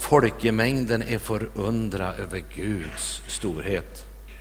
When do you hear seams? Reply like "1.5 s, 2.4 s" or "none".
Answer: none